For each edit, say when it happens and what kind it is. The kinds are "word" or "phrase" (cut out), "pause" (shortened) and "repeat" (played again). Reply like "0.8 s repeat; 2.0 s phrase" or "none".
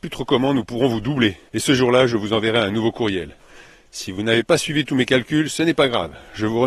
1.5 s pause